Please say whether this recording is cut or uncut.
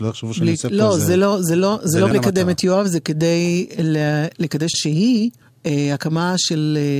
cut